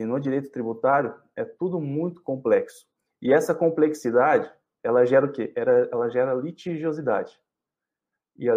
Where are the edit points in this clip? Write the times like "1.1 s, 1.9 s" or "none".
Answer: none